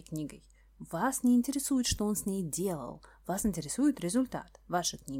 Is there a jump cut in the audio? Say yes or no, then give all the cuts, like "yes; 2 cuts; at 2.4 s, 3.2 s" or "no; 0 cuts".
no; 0 cuts